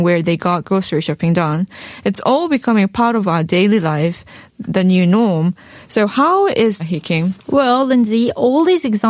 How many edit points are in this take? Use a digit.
1